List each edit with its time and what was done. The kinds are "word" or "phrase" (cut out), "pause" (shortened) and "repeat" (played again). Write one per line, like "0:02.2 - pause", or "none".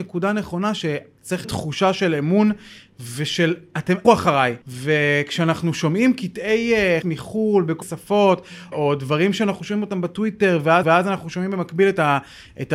0:01.4 - word
0:04.0 - word
0:04.6 - pause
0:07.0 - word
0:07.8 - word
0:08.7 - word
0:10.8 - repeat